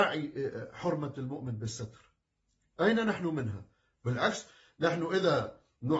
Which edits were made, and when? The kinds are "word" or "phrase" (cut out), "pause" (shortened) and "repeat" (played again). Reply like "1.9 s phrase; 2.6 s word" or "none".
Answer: none